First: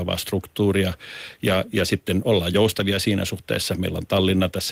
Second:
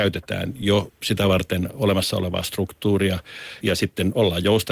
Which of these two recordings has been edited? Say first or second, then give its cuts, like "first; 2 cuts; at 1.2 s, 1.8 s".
second; 1 cut; at 3.6 s